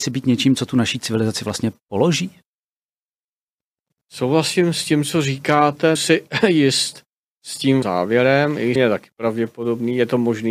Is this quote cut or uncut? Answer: cut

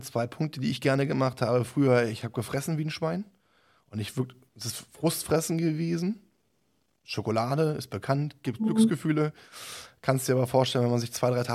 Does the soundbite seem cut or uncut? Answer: uncut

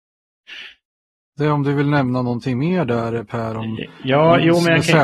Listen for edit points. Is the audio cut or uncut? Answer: uncut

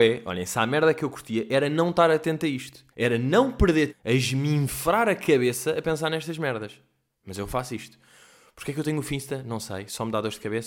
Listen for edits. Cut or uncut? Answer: cut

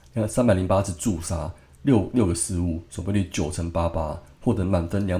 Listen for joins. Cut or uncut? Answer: uncut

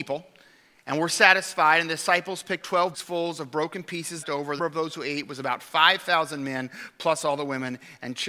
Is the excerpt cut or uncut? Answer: cut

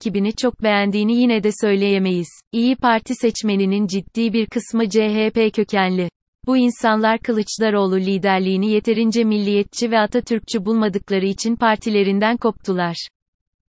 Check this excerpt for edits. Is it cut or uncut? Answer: cut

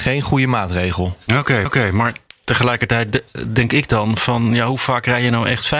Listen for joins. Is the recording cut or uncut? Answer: cut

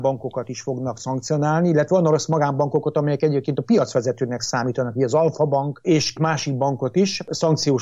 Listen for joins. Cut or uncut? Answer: cut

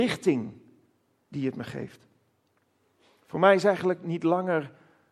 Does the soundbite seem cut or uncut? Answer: cut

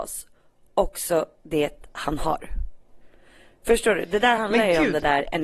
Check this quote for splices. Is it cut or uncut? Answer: uncut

